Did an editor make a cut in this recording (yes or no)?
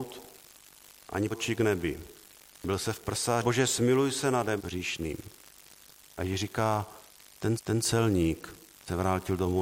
yes